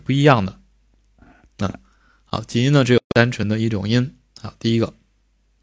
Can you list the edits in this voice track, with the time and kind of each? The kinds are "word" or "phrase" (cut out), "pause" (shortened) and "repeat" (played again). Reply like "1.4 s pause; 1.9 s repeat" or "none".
none